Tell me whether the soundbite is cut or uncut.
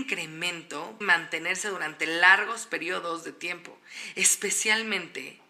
cut